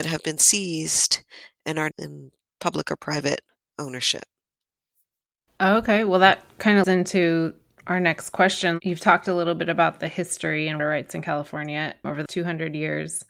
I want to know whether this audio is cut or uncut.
cut